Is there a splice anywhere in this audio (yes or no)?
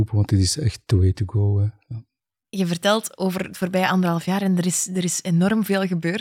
no